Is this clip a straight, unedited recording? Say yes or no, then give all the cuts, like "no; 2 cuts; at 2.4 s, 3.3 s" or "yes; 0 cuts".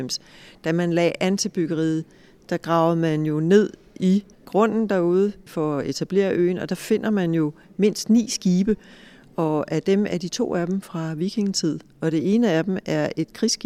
no; 1 cut; at 4.3 s